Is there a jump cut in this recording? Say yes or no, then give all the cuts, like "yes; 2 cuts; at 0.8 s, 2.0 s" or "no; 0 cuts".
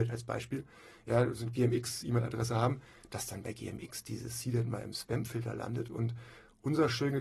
no; 0 cuts